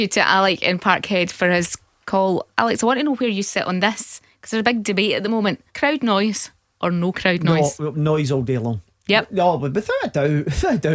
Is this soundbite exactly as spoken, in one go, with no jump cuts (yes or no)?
no